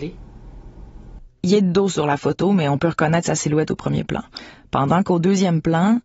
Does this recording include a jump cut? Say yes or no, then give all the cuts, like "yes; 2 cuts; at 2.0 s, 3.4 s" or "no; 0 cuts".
no; 0 cuts